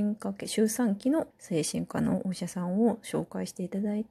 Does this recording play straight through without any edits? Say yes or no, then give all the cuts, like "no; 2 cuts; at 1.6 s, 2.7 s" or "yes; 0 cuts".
no; 1 cut; at 1.3 s